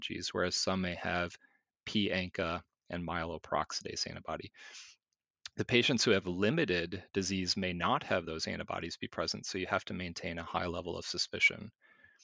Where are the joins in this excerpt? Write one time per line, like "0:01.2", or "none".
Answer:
none